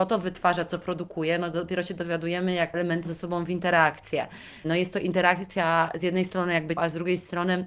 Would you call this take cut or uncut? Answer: cut